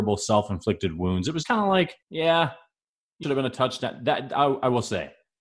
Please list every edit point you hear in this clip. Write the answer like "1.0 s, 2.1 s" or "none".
1.4 s, 2.0 s, 3.2 s